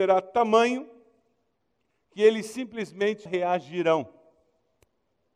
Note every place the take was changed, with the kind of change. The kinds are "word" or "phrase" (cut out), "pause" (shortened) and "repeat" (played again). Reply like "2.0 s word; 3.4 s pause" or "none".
3.3 s word